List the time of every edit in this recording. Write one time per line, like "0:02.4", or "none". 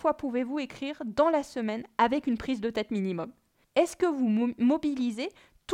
none

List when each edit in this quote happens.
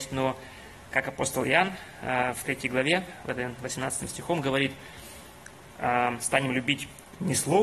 none

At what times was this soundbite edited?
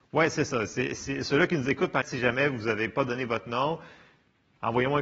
0:02.0

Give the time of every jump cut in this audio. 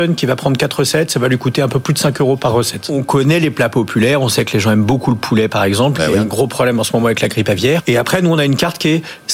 none

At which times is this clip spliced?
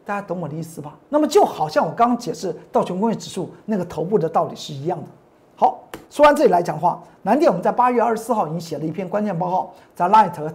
0:01.0
0:06.0

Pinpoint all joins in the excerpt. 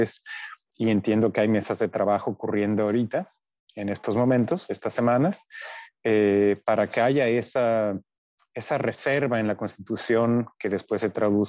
none

